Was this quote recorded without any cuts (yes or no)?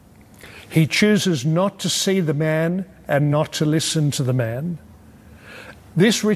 yes